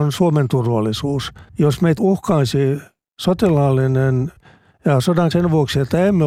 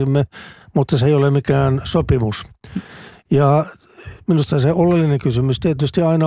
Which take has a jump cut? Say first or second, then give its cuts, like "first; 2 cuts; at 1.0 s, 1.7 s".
first; 4 cuts; at 1.5 s, 2.0 s, 4.4 s, 5.3 s